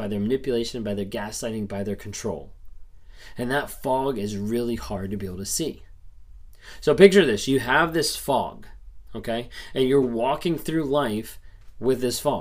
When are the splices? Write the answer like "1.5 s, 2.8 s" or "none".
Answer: none